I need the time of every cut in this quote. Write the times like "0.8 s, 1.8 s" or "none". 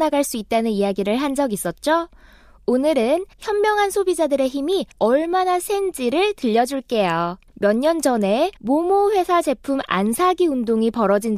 3.3 s, 4.9 s, 7.5 s, 8.6 s